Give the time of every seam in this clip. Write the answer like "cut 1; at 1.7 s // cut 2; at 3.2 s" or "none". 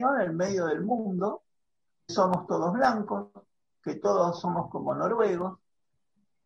cut 1; at 2.1 s